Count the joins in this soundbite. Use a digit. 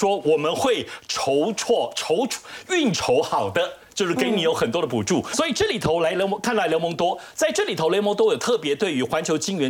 1